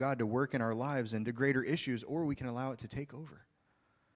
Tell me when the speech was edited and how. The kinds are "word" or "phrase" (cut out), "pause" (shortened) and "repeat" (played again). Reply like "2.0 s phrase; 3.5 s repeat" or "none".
1.2 s phrase